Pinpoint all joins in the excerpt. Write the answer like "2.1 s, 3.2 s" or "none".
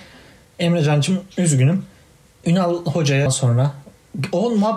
1.3 s, 2.4 s, 3.3 s